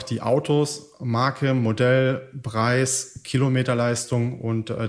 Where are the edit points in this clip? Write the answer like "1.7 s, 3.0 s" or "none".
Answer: none